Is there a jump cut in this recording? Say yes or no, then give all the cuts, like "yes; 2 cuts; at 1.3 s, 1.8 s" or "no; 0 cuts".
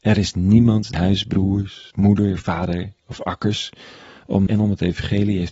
yes; 4 cuts; at 0.9 s, 1.9 s, 3.0 s, 4.5 s